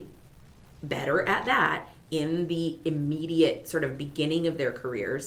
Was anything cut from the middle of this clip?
no; 0 cuts

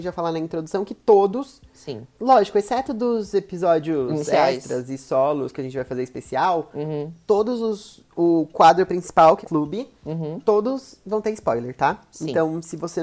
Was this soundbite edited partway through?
yes; 2 cuts; at 2.1 s, 9.4 s

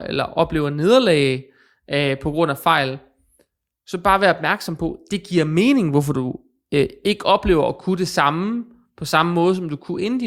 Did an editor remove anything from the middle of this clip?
no; 0 cuts

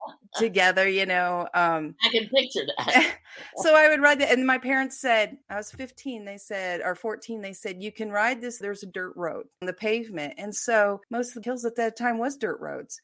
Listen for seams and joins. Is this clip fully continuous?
no; 5 cuts; at 5.4 s, 8.6 s, 9.6 s, 11.0 s, 11.4 s

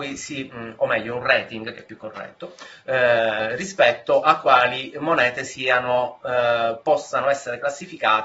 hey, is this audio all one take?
yes; 0 cuts

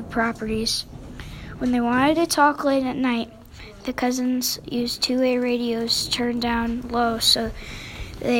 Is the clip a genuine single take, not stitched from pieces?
yes; 0 cuts

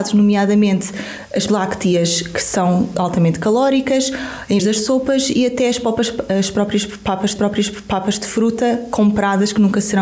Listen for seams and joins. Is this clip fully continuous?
no; 4 cuts; at 1.5 s, 2.9 s, 4.6 s, 7.4 s

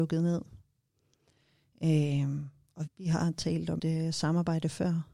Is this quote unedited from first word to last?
no; 2 cuts; at 2.9 s, 3.8 s

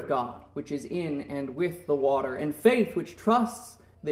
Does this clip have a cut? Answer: no; 0 cuts

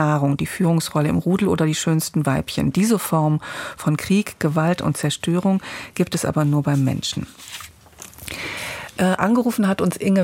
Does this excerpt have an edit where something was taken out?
no; 0 cuts

